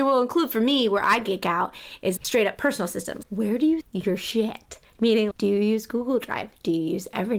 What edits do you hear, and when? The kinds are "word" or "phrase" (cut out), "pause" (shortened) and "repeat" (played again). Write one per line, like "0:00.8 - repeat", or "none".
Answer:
0:02.2 - word
0:03.2 - word
0:03.8 - word
0:05.3 - word